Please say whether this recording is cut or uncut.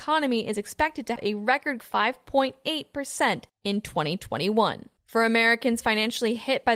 cut